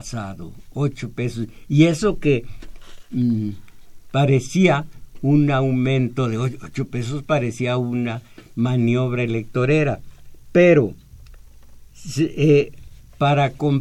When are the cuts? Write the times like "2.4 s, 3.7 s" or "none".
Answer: none